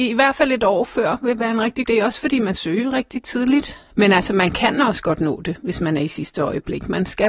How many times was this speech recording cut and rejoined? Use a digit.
2